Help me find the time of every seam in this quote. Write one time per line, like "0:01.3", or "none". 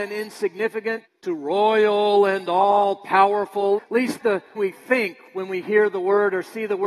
0:01.0
0:03.8
0:04.2
0:04.6